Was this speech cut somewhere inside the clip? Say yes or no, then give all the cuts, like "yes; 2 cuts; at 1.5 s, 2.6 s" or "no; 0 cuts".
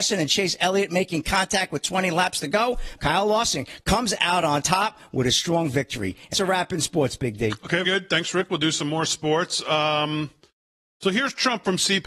yes; 3 cuts; at 3.0 s, 6.3 s, 7.8 s